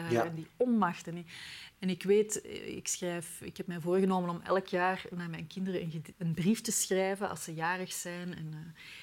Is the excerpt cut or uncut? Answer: cut